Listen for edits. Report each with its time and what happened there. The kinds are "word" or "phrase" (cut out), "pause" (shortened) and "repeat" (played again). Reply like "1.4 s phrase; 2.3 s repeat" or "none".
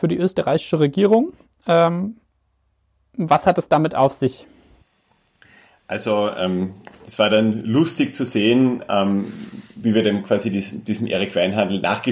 none